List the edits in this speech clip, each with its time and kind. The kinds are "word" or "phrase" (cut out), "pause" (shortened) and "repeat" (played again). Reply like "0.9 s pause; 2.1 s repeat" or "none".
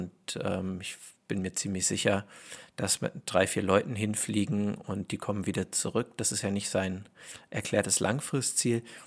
none